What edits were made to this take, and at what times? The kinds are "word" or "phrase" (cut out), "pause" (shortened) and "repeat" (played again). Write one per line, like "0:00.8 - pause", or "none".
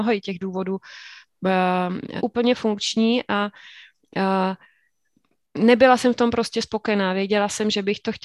0:02.2 - word